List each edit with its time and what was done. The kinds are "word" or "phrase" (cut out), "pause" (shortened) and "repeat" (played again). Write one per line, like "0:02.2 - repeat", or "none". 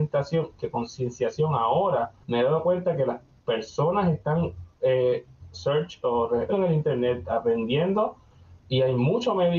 0:02.2 - pause
0:04.7 - pause
0:06.5 - word